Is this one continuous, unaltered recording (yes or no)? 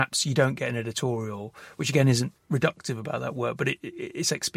yes